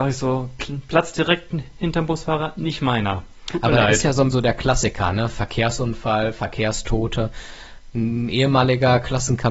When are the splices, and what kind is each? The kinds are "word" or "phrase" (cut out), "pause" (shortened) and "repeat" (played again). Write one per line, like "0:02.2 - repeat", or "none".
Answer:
0:04.3 - word